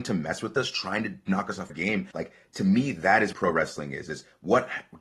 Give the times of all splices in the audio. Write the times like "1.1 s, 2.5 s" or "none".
1.7 s, 2.1 s, 3.3 s